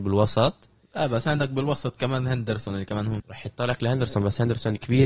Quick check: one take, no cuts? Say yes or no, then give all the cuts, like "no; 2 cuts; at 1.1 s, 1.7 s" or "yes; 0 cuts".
no; 1 cut; at 3.2 s